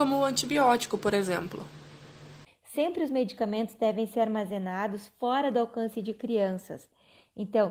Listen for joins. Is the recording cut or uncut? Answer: uncut